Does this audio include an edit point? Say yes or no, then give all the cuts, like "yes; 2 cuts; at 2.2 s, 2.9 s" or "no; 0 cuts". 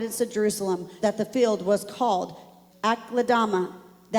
yes; 2 cuts; at 1.0 s, 2.7 s